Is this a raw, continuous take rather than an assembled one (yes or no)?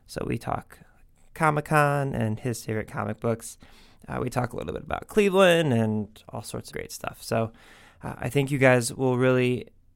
no